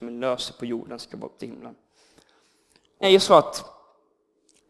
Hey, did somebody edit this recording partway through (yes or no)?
yes